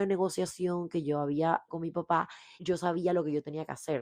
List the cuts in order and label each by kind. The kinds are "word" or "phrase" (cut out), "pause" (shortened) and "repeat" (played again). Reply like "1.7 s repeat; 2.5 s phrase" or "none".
1.7 s word; 2.6 s word